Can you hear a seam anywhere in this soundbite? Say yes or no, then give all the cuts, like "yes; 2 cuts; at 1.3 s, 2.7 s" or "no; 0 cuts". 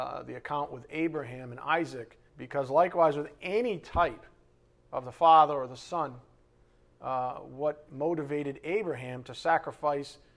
yes; 2 cuts; at 2.3 s, 7.9 s